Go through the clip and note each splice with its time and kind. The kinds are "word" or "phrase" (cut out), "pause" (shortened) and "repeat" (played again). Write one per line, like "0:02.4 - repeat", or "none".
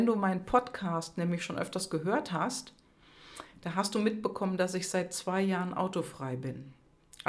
none